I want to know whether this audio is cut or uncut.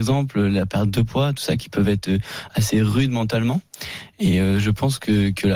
uncut